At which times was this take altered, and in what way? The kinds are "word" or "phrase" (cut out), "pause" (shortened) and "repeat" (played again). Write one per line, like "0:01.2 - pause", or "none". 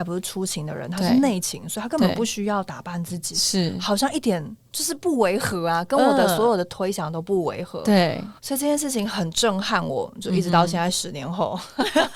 0:08.4 - pause